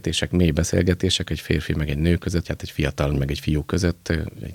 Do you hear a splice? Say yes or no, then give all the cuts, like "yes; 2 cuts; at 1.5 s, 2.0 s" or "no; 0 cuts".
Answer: yes; 3 cuts; at 1.3 s, 2.4 s, 3.1 s